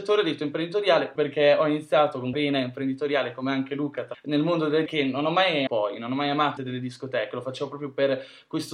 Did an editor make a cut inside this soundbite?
yes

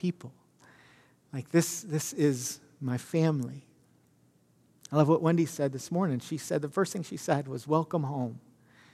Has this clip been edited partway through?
no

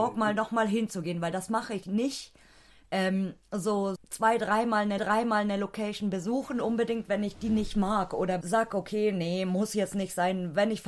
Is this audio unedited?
no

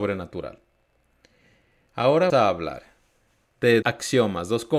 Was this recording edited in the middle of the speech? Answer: yes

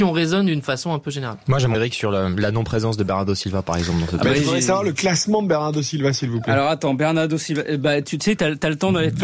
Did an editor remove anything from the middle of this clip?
yes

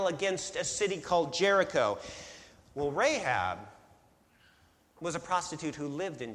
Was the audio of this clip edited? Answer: no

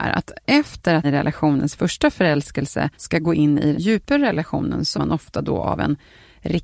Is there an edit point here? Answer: yes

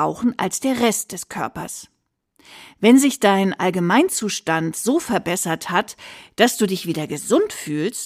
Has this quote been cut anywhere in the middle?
no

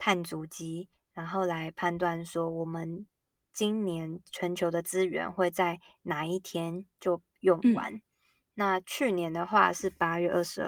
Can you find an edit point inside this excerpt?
no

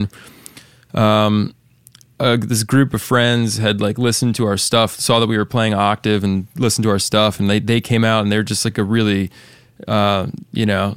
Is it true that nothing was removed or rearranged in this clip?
yes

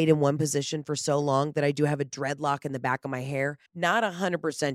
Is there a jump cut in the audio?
yes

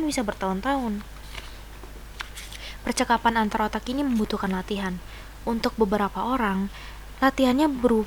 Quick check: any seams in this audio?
no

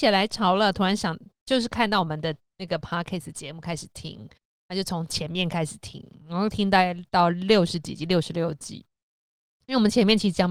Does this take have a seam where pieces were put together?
no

